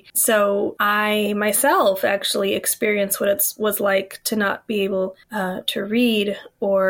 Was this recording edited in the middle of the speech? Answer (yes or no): yes